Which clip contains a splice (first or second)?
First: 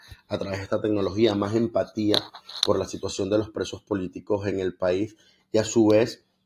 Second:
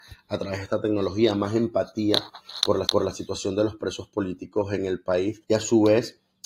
second